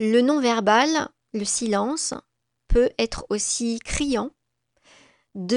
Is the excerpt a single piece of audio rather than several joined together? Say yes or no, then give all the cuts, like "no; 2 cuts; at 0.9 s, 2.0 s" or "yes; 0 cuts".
yes; 0 cuts